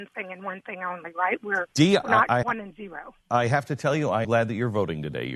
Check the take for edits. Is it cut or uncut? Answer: cut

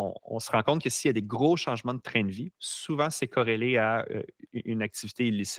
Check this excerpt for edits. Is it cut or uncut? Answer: cut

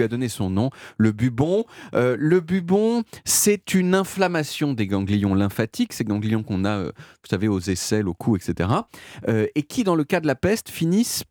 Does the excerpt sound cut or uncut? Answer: uncut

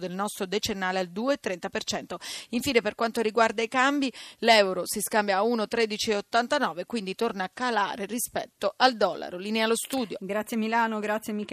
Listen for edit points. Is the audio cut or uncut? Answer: uncut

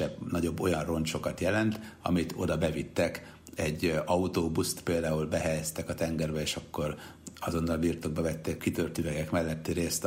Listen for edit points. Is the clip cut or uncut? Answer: cut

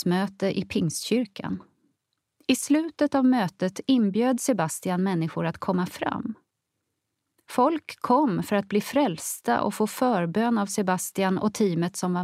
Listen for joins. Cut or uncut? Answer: uncut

